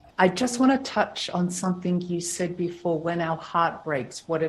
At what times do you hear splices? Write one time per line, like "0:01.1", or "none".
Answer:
none